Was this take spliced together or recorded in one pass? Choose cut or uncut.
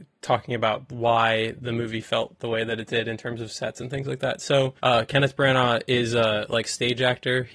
cut